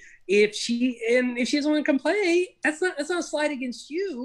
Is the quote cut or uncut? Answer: uncut